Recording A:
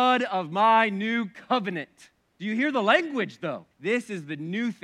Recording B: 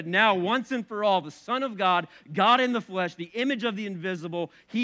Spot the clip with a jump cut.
A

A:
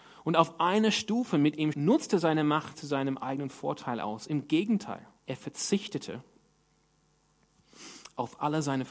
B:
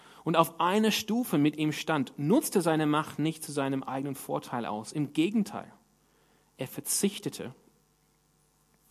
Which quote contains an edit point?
A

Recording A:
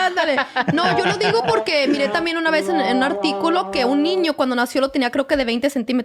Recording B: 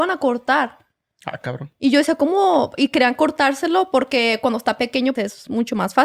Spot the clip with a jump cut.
B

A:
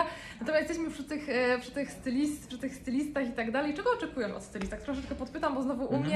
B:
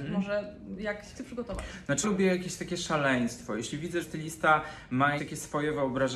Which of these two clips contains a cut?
B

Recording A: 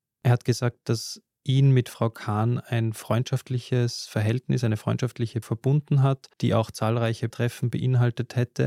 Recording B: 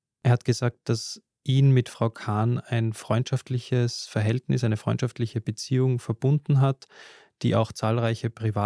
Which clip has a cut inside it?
A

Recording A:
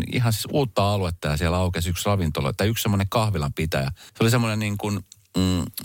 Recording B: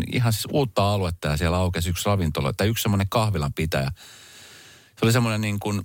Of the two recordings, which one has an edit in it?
A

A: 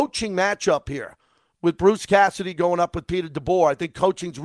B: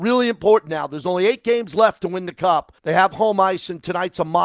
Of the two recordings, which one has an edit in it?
B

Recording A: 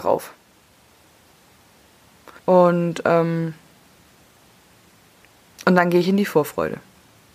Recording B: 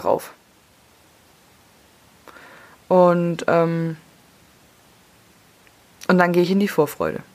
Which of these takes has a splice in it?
A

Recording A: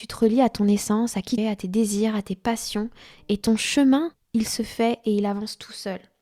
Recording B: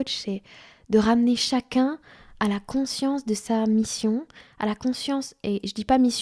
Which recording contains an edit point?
A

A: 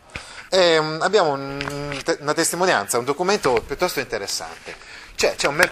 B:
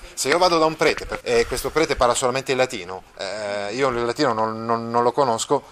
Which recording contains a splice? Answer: B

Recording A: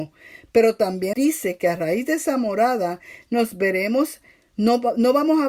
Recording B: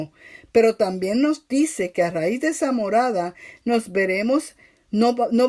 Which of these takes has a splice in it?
A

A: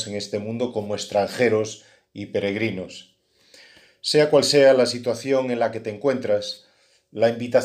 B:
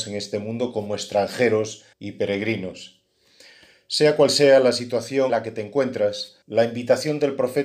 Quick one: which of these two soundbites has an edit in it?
B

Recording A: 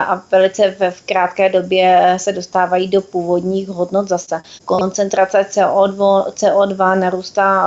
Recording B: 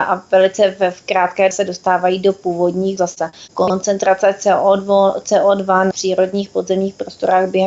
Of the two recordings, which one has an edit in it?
B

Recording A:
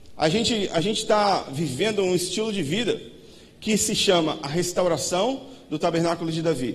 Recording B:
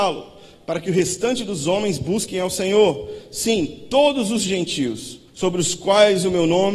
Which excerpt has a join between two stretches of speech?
B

